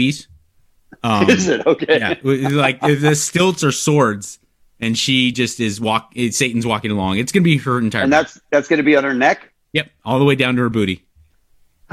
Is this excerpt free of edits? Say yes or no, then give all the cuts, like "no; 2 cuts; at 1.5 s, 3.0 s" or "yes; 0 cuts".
yes; 0 cuts